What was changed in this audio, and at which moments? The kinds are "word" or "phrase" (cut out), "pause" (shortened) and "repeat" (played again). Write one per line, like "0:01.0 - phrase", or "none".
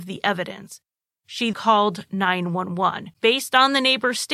0:01.5 - word
0:03.1 - pause